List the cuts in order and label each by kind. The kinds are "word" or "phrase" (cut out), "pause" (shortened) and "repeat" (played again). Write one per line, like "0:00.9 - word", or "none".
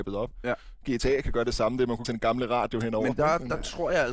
0:02.0 - word

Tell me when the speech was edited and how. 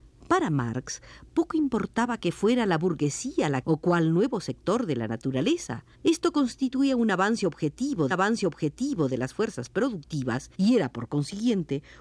0:03.6 - phrase
0:05.9 - pause
0:08.1 - repeat
0:10.5 - pause

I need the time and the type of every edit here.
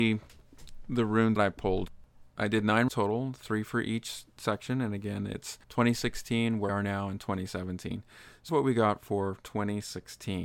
0:01.4 - word
0:02.9 - word
0:05.6 - pause
0:06.7 - word
0:08.5 - word

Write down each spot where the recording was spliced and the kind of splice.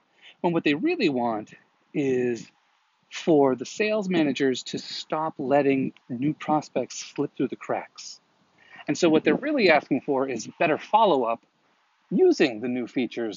0:06.0 - pause

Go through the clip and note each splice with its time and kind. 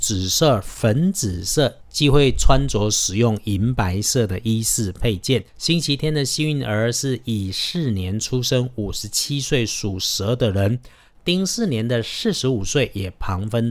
0:05.5 - pause

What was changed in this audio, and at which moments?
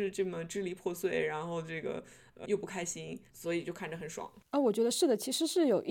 0:02.4 - word
0:03.3 - pause
0:04.5 - pause

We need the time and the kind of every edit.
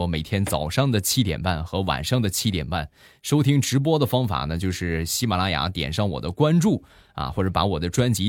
none

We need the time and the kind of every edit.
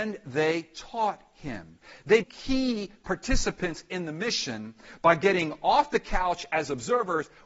0:02.2 - word

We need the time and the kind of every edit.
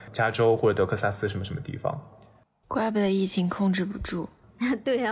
none

